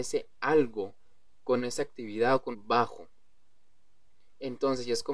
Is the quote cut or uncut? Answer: cut